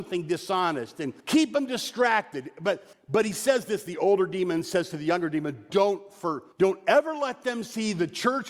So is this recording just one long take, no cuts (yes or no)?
no